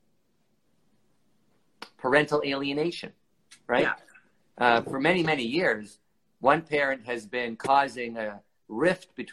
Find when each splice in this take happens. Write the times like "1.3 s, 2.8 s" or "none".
none